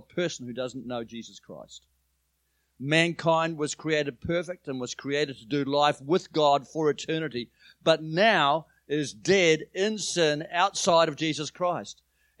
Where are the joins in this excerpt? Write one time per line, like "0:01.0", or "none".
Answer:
none